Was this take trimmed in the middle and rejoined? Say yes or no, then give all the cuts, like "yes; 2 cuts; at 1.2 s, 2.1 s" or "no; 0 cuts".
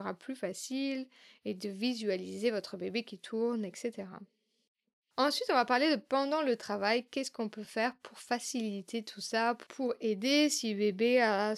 no; 0 cuts